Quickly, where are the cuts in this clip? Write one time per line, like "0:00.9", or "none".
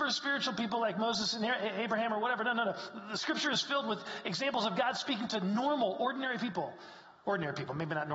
none